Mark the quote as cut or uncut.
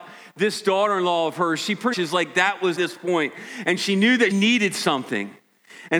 cut